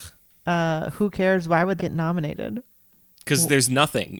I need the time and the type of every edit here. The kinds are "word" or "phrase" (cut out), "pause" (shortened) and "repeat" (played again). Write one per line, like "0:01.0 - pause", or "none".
0:01.8 - word